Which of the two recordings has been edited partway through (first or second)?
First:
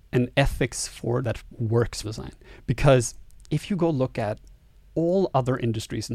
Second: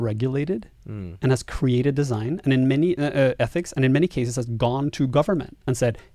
first